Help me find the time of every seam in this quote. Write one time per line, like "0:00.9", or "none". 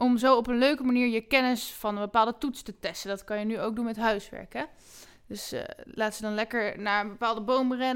none